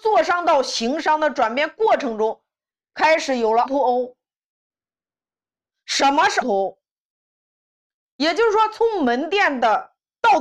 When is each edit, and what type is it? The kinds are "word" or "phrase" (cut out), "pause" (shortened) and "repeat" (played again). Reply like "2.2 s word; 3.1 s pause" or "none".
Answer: 3.7 s word; 6.4 s word